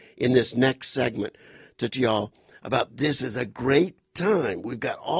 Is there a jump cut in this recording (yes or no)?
yes